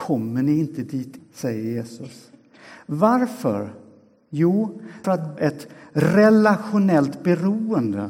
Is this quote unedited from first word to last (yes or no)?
no